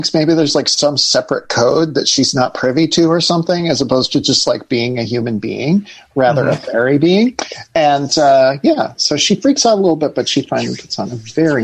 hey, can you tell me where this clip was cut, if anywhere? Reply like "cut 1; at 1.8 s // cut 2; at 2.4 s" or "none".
none